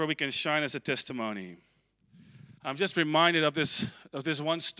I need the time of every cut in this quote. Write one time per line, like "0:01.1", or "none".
0:02.6